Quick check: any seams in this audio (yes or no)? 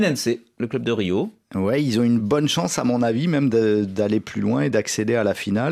no